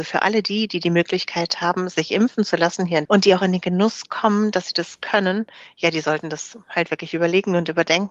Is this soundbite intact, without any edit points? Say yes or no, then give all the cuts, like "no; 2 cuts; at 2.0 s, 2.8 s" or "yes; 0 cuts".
no; 1 cut; at 3.0 s